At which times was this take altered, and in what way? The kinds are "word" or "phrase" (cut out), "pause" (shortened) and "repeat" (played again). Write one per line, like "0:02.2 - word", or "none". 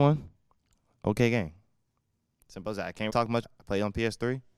0:03.1 - word
0:03.4 - word

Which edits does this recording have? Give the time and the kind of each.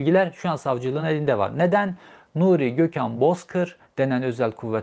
none

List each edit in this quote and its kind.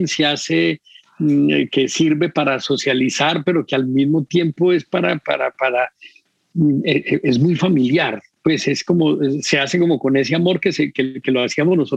none

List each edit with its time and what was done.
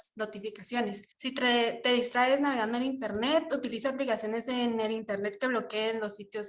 0:01.1 - pause

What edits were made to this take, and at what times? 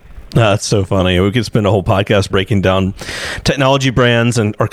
0:02.3 - word

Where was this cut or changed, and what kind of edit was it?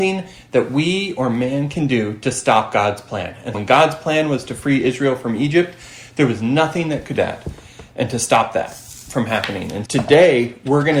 0:03.5 - word
0:07.2 - phrase
0:09.9 - word

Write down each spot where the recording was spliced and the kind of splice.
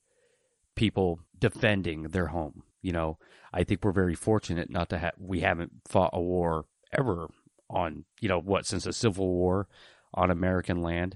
0:01.3 - pause
0:02.7 - pause
0:06.8 - pause
0:08.1 - pause

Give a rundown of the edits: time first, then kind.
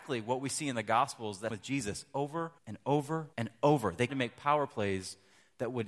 0:01.5 - word
0:02.6 - pause
0:03.3 - pause
0:04.1 - phrase

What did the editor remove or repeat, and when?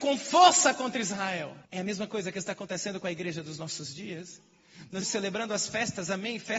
0:01.6 - pause
0:05.0 - word

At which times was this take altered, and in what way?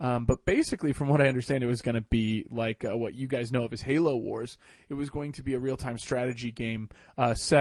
none

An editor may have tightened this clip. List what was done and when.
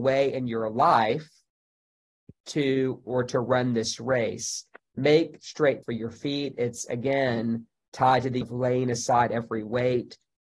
0:03.0 - phrase
0:05.8 - word
0:08.4 - word

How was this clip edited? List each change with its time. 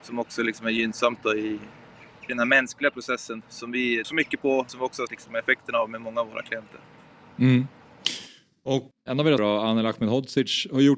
0:02.3 - word
0:03.4 - word
0:04.0 - word
0:04.7 - word
0:05.1 - word
0:08.9 - word
0:09.4 - word

